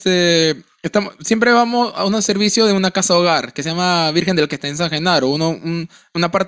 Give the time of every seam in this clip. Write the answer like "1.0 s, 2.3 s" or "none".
4.5 s